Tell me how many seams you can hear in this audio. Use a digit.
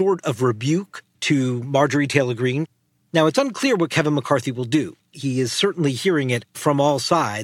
0